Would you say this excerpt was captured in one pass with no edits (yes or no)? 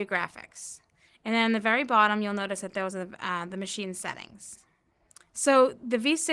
yes